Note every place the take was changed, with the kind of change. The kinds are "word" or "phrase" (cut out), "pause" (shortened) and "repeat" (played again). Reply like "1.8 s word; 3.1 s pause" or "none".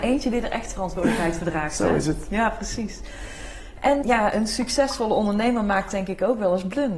4.0 s word